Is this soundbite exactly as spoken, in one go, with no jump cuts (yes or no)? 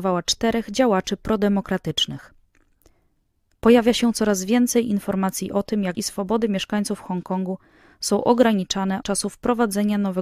no